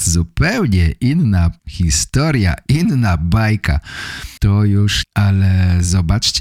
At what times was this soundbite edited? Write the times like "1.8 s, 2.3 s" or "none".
1.6 s, 4.4 s, 5.0 s